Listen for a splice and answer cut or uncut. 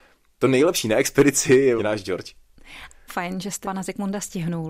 cut